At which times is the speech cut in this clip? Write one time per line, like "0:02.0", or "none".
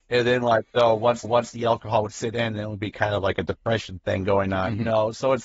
0:01.2